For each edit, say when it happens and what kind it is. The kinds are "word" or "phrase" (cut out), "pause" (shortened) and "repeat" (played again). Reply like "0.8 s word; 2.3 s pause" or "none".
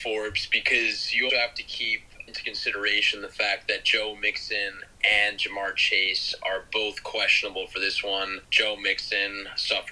1.3 s word; 2.3 s word; 8.4 s pause